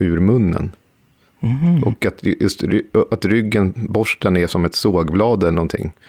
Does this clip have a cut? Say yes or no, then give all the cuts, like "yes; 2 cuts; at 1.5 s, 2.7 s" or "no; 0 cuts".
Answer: no; 0 cuts